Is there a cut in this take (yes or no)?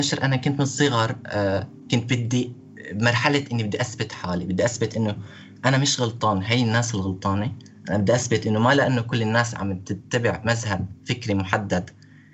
no